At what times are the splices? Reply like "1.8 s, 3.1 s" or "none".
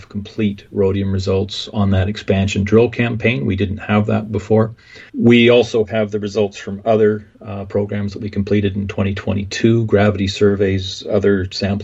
5.1 s, 7.3 s